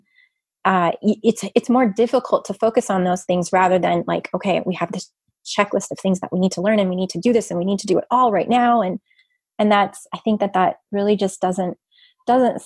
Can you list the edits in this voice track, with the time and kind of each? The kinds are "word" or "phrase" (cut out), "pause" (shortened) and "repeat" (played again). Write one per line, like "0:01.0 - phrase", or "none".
none